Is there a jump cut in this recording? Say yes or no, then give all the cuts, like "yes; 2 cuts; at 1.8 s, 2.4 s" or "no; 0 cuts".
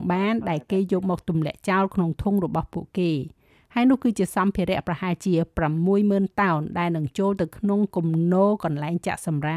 no; 0 cuts